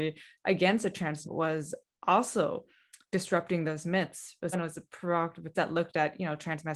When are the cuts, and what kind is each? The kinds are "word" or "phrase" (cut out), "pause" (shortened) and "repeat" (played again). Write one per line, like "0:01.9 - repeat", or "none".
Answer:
0:01.2 - word
0:03.0 - word
0:04.5 - word
0:05.5 - word